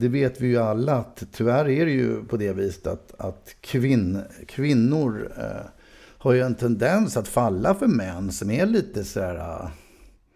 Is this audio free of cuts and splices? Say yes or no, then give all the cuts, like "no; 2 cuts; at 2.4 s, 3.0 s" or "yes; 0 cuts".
yes; 0 cuts